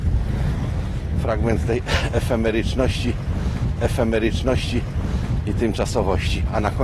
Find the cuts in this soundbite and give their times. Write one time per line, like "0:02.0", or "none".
0:03.8